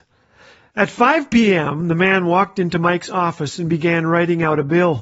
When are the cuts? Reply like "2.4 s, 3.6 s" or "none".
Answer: none

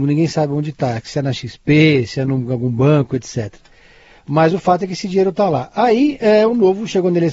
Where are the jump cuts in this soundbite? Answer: none

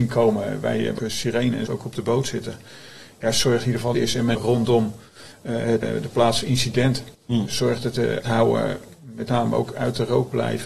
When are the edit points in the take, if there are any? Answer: 1.0 s, 1.7 s, 3.9 s, 4.4 s, 5.8 s, 7.1 s, 8.2 s

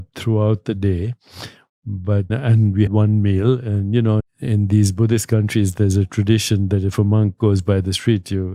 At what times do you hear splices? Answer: 2.3 s, 2.9 s, 4.2 s

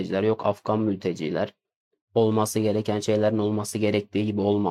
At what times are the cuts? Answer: none

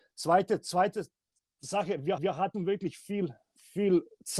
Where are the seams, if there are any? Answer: 2.2 s

